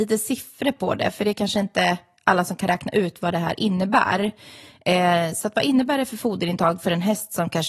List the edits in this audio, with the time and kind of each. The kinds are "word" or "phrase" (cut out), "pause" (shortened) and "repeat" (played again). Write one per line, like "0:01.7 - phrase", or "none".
none

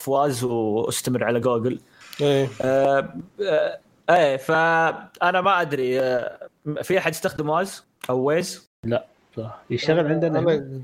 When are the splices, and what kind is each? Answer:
none

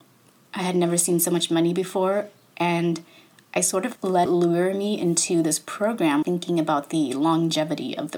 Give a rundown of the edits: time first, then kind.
0:04.3 - word
0:06.2 - word

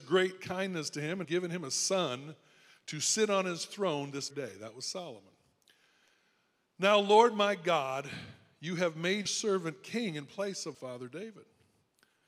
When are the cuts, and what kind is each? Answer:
0:01.2 - word
0:04.3 - word
0:09.3 - word
0:10.7 - word

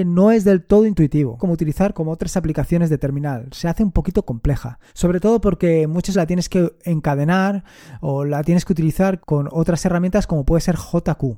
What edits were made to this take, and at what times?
0:01.4 - phrase
0:01.9 - word
0:04.9 - pause
0:06.1 - word
0:09.2 - word

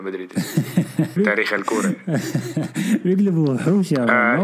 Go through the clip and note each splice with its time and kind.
0:01.2 - phrase

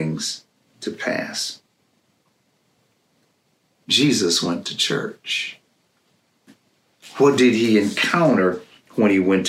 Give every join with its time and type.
none

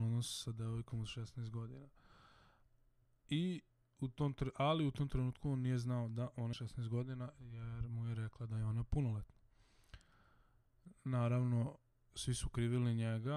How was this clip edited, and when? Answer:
0:06.5 - word

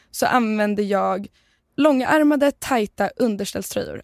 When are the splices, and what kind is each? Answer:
none

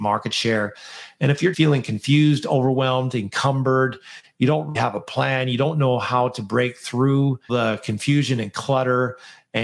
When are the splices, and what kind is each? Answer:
0:01.5 - word
0:04.7 - word
0:07.5 - word

